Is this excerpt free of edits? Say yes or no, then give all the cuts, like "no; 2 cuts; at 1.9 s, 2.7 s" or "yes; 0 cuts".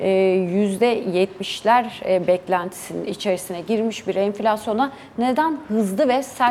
yes; 0 cuts